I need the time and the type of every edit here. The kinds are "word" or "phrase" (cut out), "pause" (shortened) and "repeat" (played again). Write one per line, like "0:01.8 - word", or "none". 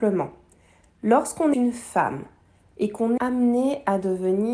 0:01.5 - word
0:03.2 - word

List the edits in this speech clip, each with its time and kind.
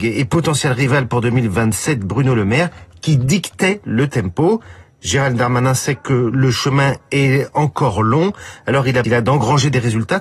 0:09.0 - phrase

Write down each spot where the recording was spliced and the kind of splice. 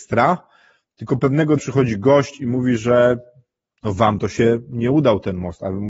0:01.6 - word

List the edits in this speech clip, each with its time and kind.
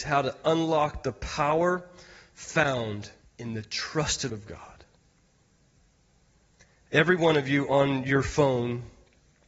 0:03.2 - pause
0:04.3 - word

